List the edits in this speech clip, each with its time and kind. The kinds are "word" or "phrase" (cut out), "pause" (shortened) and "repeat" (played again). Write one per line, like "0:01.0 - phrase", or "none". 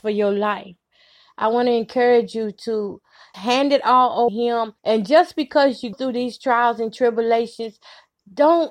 0:03.3 - word
0:04.3 - phrase
0:04.8 - pause
0:05.9 - word